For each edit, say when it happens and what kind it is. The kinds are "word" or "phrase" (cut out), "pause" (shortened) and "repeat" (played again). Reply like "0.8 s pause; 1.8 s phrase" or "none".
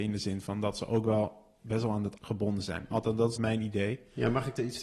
2.2 s word; 3.4 s word

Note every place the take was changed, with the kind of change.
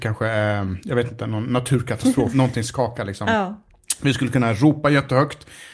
2.3 s phrase

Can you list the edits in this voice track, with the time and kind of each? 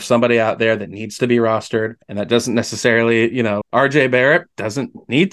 2.0 s pause; 3.6 s word

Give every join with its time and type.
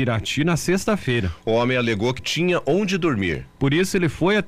2.2 s word

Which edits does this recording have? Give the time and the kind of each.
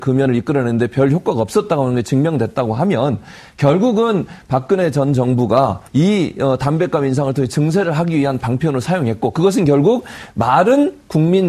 5.9 s pause

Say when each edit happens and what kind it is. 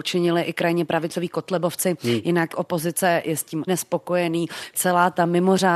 2.5 s word; 3.7 s word; 4.7 s word

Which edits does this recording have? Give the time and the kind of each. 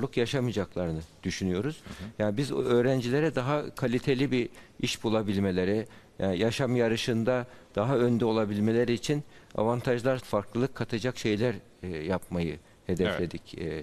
10.2 s word

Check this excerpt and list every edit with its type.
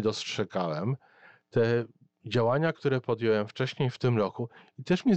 none

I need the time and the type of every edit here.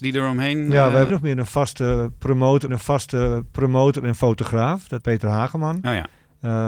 1.1 s word; 2.7 s repeat; 5.0 s word

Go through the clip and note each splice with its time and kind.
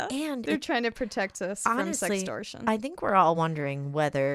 none

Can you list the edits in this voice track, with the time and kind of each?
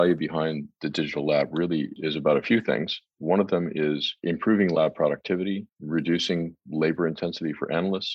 5.7 s word

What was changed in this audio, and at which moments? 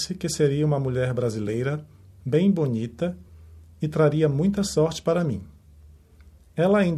none

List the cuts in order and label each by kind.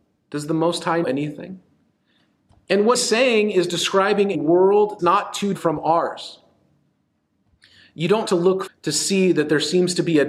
1.0 s word; 2.9 s word; 4.3 s word; 5.0 s word; 5.5 s word; 8.2 s word; 8.7 s word

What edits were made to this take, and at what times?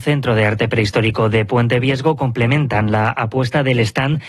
none

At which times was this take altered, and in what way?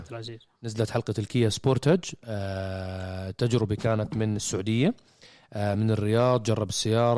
none

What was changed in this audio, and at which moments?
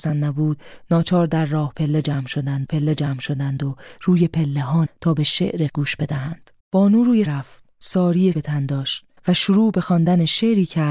2.7 s repeat; 4.9 s word; 5.7 s word; 6.6 s pause; 7.3 s word; 8.3 s word; 9.2 s pause

